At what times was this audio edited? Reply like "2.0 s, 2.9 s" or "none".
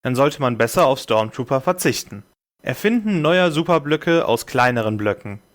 2.4 s